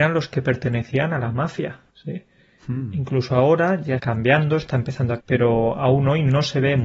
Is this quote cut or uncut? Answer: cut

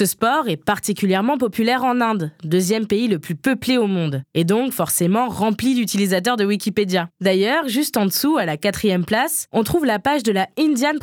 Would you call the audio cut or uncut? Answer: uncut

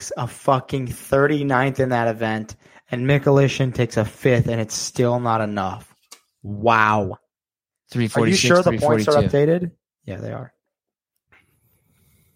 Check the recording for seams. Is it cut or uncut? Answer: uncut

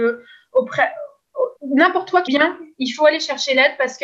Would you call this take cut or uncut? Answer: cut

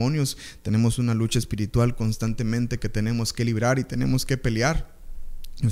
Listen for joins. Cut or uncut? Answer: uncut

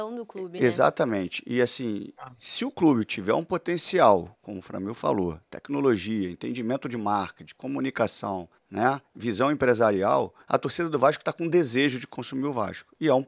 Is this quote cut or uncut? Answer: cut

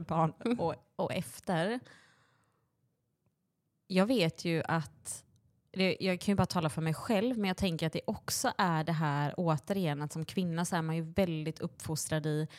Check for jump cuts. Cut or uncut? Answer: uncut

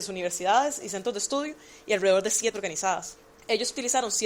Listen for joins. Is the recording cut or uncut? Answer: cut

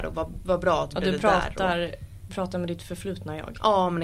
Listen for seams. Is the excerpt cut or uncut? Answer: cut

